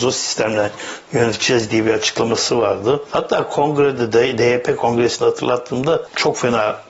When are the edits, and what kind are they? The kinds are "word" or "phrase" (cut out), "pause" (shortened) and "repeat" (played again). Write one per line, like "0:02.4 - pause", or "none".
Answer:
none